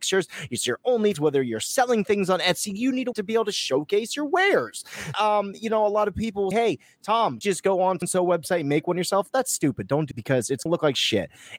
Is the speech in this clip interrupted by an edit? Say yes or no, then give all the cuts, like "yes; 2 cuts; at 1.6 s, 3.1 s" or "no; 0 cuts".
yes; 8 cuts; at 1.1 s, 3.1 s, 5.1 s, 6.5 s, 7.4 s, 8.0 s, 10.1 s, 10.7 s